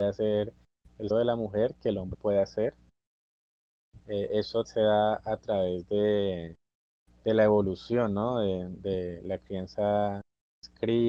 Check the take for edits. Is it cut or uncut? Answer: cut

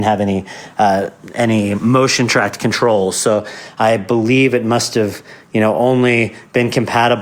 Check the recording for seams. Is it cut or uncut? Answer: uncut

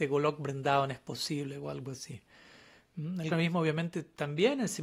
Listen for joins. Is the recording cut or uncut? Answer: cut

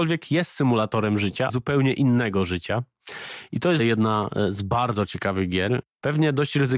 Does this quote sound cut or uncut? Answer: cut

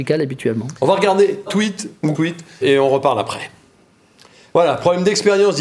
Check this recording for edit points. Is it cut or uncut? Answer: cut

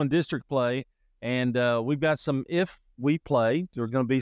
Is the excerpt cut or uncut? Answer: uncut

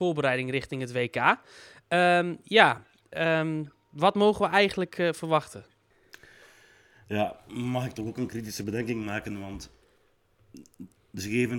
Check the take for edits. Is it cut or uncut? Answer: uncut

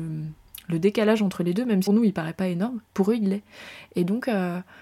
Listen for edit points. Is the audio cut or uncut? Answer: cut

